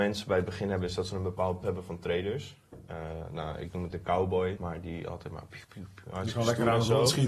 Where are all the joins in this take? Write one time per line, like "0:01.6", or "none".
0:01.6
0:03.9
0:04.6
0:05.6